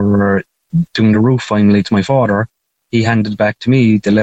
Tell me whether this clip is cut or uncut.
uncut